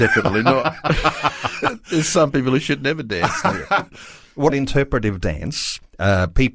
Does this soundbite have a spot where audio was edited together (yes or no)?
yes